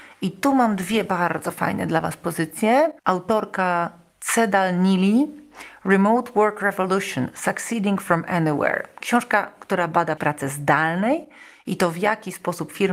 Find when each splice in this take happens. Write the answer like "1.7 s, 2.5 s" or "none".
3.0 s, 10.2 s